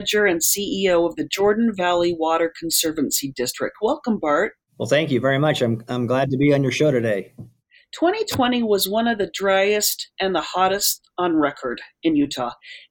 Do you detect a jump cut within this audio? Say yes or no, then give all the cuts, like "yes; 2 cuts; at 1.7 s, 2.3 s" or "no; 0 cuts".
no; 0 cuts